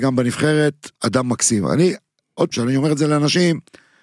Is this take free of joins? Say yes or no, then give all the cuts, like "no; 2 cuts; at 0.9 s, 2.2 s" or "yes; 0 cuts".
no; 2 cuts; at 0.9 s, 2.5 s